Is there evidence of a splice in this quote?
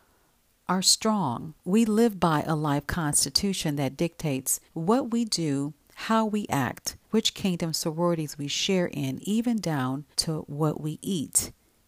yes; 4 cuts; at 1.6 s, 4.7 s, 7.0 s, 10.1 s

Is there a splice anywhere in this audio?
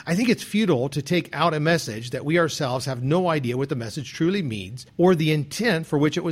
yes; 1 cut; at 4.9 s

